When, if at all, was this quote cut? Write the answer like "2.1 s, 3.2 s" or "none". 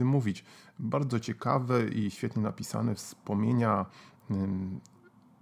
none